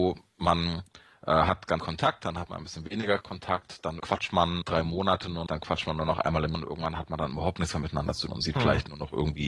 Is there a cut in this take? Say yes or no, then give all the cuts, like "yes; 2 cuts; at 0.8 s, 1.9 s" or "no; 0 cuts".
yes; 6 cuts; at 1.8 s, 4.0 s, 4.6 s, 5.5 s, 6.5 s, 8.3 s